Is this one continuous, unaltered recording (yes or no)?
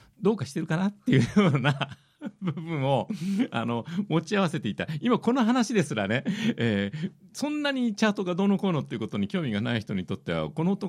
yes